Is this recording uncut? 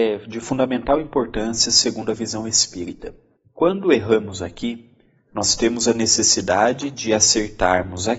yes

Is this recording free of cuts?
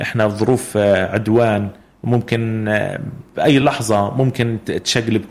yes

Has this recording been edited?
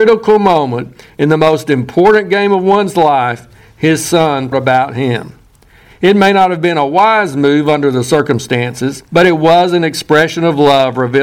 yes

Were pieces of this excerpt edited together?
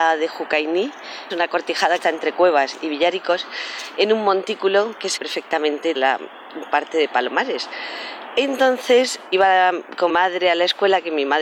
yes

